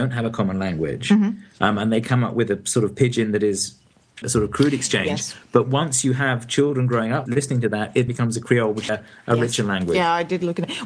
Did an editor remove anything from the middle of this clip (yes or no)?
yes